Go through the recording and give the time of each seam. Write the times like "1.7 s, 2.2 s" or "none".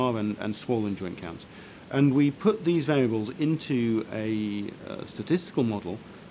none